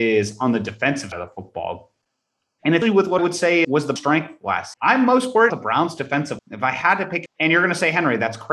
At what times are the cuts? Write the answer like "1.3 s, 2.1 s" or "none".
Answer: 1.1 s, 2.8 s, 3.2 s, 3.6 s, 4.0 s, 4.7 s, 5.5 s, 6.4 s, 7.3 s